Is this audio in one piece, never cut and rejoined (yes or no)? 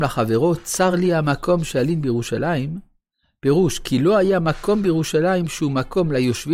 yes